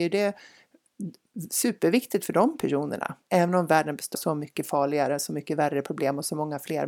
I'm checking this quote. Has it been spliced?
yes; 2 cuts; at 3.2 s, 4.1 s

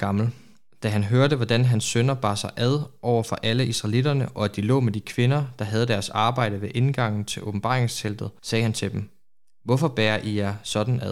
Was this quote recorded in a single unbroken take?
yes; 0 cuts

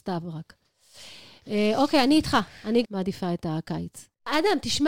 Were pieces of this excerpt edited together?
yes; 1 cut; at 2.8 s

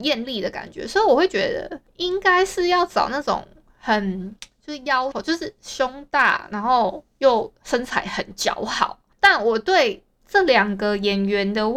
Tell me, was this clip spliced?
yes; 2 cuts; at 5.1 s, 9.2 s

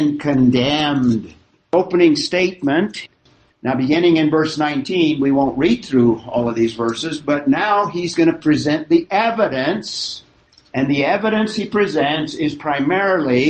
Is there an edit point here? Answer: no; 0 cuts

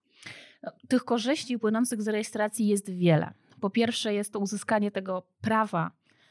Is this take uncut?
yes; 0 cuts

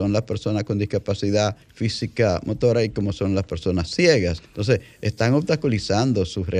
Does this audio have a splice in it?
yes; 2 cuts; at 1.6 s, 4.5 s

